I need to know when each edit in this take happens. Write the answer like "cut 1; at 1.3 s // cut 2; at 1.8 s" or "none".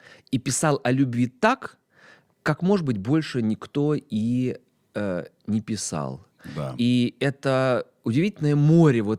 none